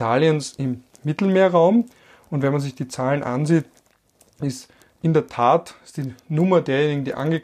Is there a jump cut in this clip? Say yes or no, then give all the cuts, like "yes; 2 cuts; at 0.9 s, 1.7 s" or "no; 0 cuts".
no; 0 cuts